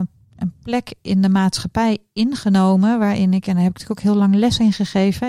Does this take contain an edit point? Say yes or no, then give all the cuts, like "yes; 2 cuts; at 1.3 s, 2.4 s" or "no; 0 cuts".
no; 0 cuts